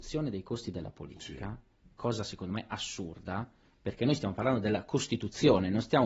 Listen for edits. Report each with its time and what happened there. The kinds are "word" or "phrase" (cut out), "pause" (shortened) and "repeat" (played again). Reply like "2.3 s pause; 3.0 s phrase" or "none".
none